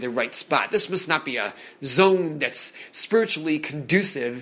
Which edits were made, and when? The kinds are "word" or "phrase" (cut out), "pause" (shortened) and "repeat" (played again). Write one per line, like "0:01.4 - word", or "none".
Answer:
none